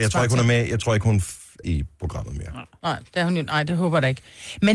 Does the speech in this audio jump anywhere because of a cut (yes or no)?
yes